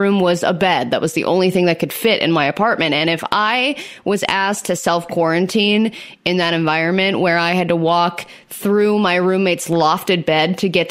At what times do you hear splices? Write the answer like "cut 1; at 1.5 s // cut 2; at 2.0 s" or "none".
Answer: none